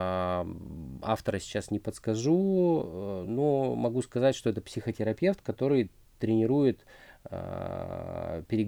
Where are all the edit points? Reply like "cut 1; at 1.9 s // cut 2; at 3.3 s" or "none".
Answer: none